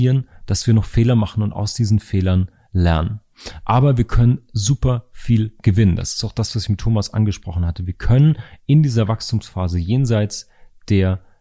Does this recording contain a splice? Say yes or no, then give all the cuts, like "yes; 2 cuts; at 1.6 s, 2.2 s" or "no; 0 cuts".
no; 0 cuts